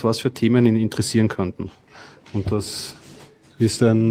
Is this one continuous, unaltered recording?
yes; 0 cuts

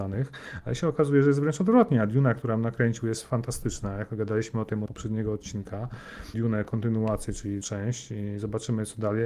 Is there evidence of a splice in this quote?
yes; 3 cuts; at 4.9 s, 6.3 s, 7.6 s

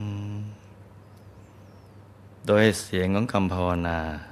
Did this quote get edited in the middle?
no; 0 cuts

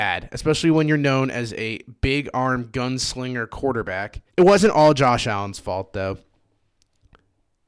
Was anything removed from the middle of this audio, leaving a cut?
yes; 1 cut; at 4.3 s

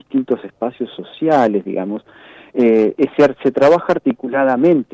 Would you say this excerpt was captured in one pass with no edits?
yes; 0 cuts

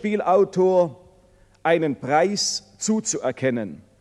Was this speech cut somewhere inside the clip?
no; 0 cuts

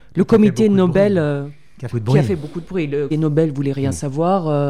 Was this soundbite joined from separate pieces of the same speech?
yes; 2 cuts; at 1.9 s, 3.1 s

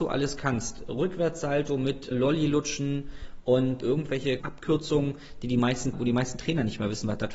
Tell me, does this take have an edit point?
yes; 4 cuts; at 2.1 s, 3.8 s, 4.4 s, 5.9 s

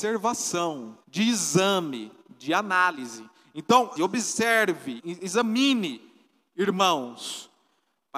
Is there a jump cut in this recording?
yes; 3 cuts; at 1.0 s, 4.0 s, 5.0 s

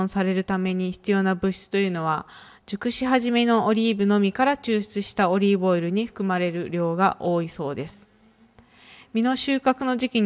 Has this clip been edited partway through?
no; 0 cuts

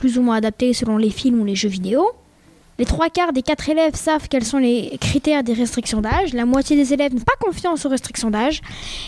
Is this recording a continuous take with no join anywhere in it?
no; 1 cut; at 7.2 s

